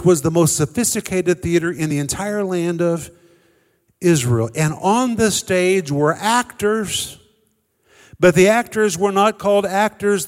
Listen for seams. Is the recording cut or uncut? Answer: uncut